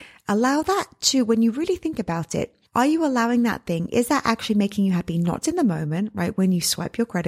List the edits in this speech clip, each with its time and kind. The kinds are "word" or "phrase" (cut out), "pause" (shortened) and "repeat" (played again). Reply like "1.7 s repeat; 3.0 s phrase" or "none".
2.7 s pause; 5.4 s word